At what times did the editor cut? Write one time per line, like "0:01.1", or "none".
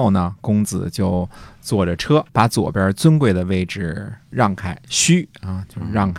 0:02.3
0:04.2